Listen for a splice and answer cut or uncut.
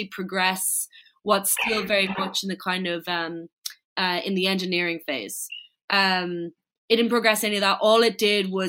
uncut